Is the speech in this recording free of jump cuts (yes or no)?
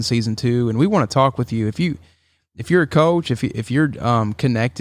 yes